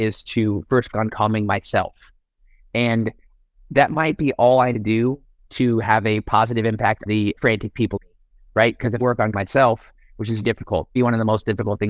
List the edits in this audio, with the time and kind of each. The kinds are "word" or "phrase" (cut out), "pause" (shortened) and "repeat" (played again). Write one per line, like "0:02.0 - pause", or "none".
0:00.9 - word
0:04.7 - word
0:07.1 - word
0:07.4 - word
0:08.0 - word
0:09.0 - word
0:09.3 - word
0:10.4 - word
0:11.0 - word